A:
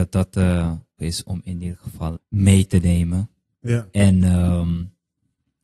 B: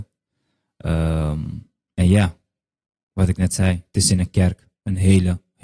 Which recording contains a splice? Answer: A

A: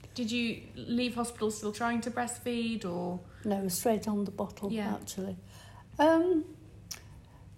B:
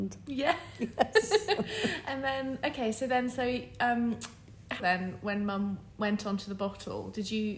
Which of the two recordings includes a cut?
B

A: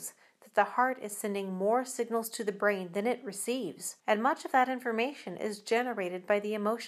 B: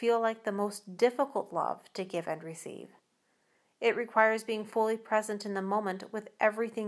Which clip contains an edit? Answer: A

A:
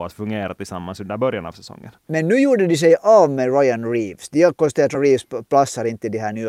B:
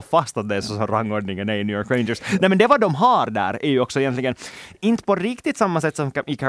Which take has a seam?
A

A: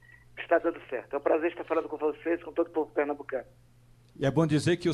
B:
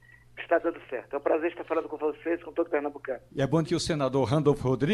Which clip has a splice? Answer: B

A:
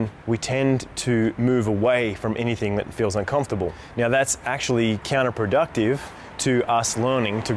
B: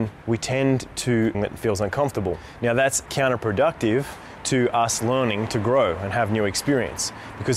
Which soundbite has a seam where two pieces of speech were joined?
B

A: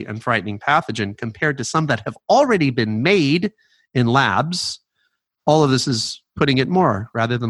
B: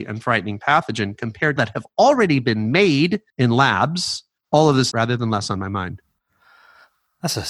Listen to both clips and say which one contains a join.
B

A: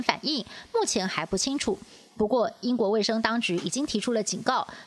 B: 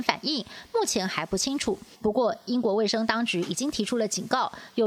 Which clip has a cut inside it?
B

